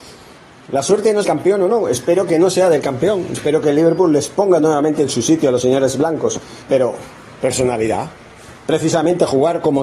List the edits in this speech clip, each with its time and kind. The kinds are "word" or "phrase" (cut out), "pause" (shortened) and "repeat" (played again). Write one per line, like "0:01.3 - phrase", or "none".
0:01.2 - phrase
0:06.6 - pause
0:08.6 - pause